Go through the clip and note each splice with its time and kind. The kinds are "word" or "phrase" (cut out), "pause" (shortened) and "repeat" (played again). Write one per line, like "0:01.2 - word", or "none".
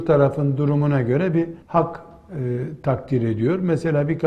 0:01.6 - pause